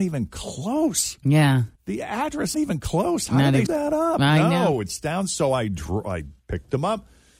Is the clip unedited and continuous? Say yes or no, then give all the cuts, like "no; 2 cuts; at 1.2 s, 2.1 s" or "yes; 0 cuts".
no; 4 cuts; at 1.8 s, 2.5 s, 3.7 s, 6.4 s